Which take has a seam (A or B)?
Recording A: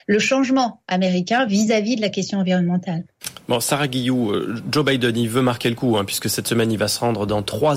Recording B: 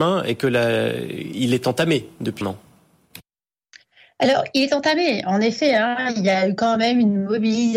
B